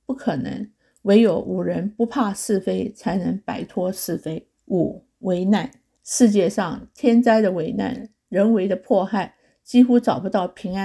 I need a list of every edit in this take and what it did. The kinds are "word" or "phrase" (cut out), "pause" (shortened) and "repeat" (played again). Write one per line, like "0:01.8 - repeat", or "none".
0:04.6 - pause
0:06.0 - pause

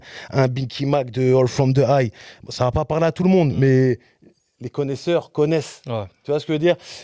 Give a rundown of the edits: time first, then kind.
none

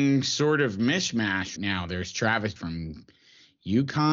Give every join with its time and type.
0:01.6 - word
0:02.6 - word

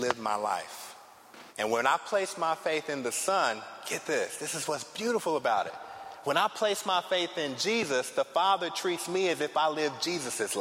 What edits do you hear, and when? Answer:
0:01.5 - pause

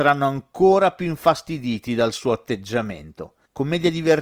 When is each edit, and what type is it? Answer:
none

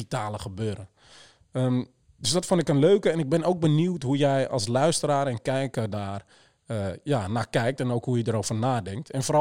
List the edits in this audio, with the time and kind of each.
none

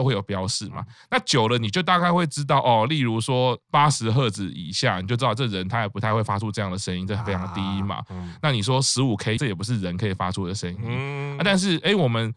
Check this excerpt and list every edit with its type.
0:09.4 - phrase

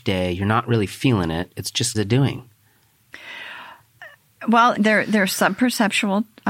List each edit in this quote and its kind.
0:01.9 - phrase
0:04.8 - word

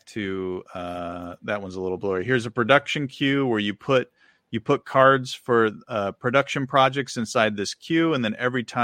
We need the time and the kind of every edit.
none

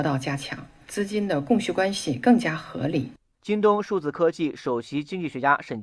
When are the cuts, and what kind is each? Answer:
none

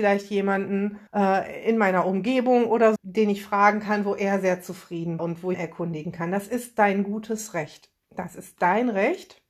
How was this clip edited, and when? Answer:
0:01.1 - pause
0:03.0 - word
0:05.2 - word
0:05.5 - phrase

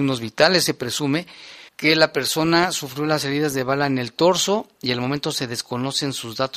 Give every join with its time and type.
0:01.7 - pause

